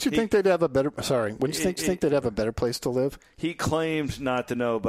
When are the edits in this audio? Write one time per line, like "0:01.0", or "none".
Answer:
0:01.8

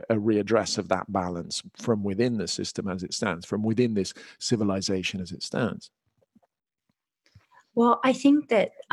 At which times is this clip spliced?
none

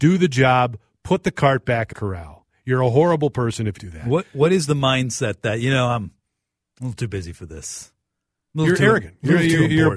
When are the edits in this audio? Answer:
0:01.9
0:03.8

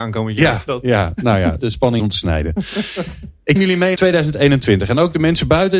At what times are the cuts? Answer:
0:01.6
0:02.0
0:03.6
0:04.0

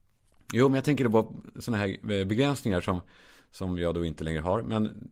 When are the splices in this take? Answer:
none

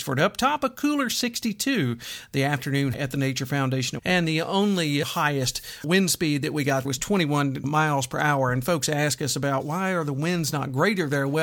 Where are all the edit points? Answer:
0:02.9
0:04.0
0:05.0
0:05.8
0:06.8
0:07.6

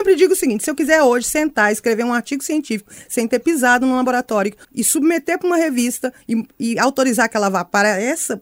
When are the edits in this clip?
0:04.6
0:06.2

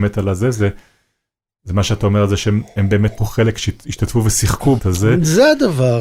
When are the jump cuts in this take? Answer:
0:03.2
0:04.8

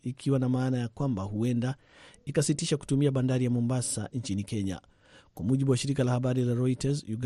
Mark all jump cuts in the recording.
none

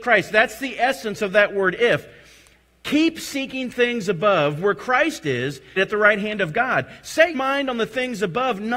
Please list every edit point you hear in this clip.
0:05.8
0:07.3

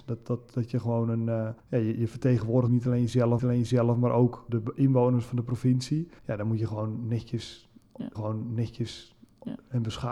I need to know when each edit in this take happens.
0:01.6
0:02.7
0:03.4
0:04.5
0:06.2
0:08.1

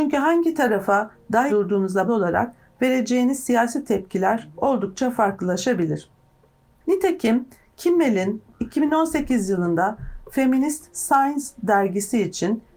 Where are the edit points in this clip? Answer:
0:01.5
0:02.1

